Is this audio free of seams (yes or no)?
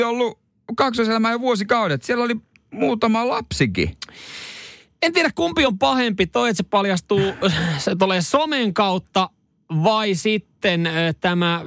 yes